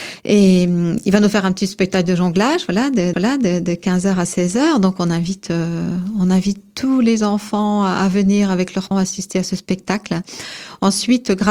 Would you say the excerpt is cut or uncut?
cut